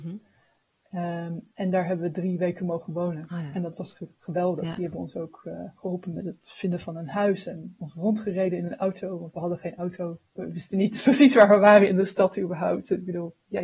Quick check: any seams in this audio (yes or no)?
yes